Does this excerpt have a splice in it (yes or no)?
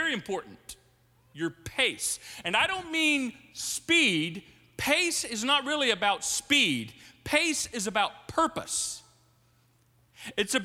no